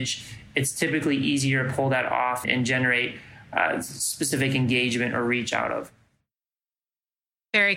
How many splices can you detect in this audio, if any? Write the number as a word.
one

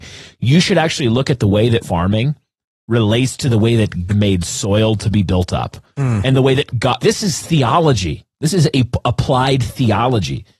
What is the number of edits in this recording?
three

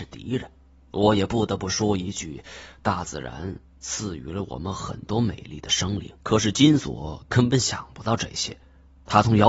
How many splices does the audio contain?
one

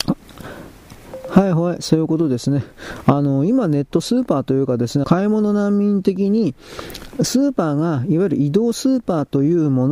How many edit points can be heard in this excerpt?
one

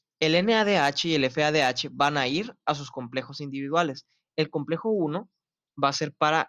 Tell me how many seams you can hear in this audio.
zero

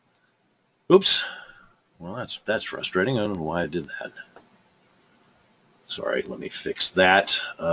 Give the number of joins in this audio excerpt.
zero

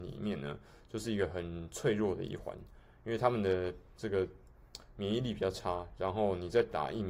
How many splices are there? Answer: zero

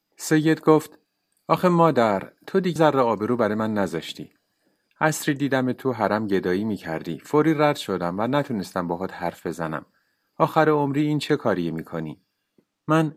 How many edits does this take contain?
one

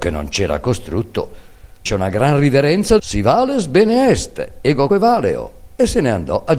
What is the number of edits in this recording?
three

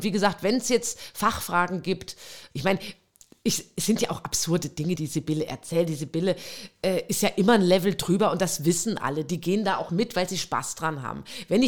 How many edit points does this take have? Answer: two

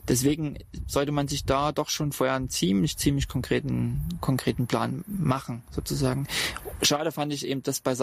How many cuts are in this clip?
zero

